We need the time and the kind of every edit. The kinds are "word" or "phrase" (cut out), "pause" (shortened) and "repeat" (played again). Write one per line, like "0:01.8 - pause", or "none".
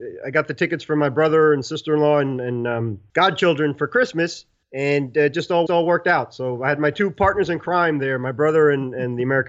0:05.7 - repeat

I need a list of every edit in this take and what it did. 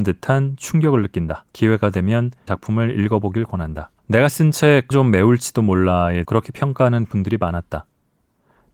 0:01.5 - pause
0:02.5 - phrase
0:04.0 - pause
0:04.9 - word
0:06.2 - word

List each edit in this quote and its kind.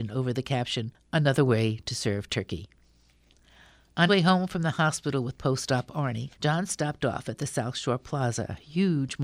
0:04.1 - word
0:06.3 - pause

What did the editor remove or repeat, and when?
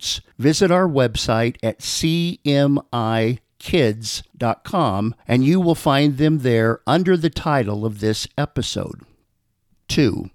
none

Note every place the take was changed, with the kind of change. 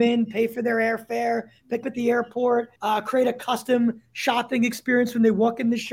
0:01.8 - phrase
0:02.8 - pause

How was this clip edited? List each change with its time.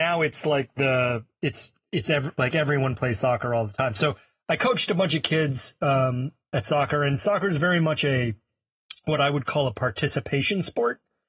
none

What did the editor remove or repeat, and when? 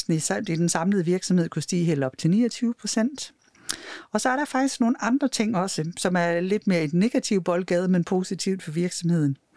none

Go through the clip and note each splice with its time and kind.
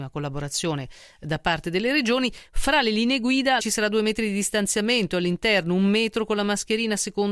0:03.6 - phrase

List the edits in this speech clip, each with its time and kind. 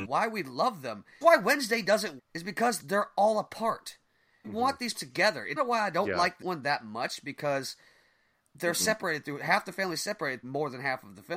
0:01.2 - word
0:02.2 - word
0:02.8 - word
0:04.4 - word
0:04.9 - word
0:05.6 - word
0:06.4 - word
0:10.4 - word

